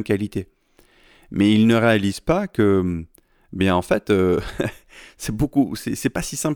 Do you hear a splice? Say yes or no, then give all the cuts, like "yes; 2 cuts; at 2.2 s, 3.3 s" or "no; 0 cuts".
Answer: no; 0 cuts